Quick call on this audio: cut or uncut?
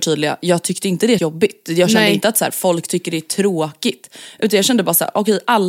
cut